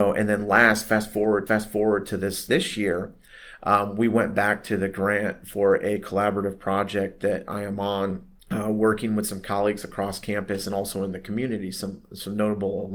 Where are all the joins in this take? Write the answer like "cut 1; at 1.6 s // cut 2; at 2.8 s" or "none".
cut 1; at 1.5 s // cut 2; at 2.5 s // cut 3; at 8.4 s